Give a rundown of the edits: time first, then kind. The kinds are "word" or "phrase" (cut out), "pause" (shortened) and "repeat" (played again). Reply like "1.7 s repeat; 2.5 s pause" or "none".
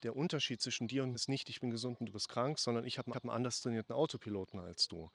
1.1 s word; 3.1 s repeat